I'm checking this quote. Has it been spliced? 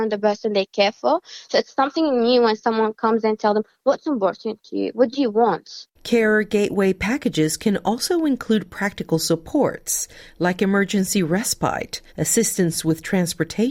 yes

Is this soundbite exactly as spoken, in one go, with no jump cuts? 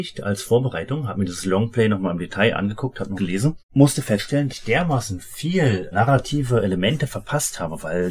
no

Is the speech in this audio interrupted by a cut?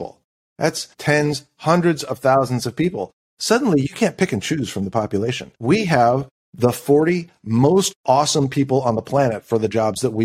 yes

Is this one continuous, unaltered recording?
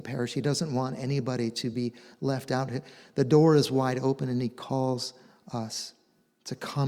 yes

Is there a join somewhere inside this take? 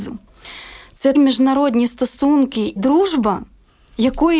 yes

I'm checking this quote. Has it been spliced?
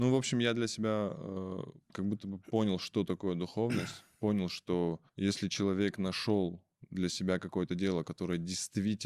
yes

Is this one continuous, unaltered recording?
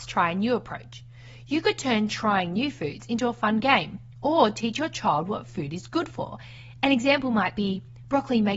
yes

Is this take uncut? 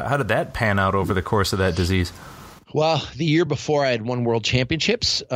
yes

